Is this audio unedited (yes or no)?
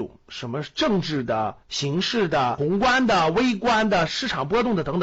no